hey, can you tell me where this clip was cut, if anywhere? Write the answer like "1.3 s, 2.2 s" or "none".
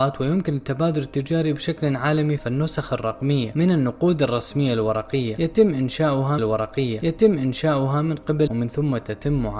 2.4 s, 6.4 s, 8.5 s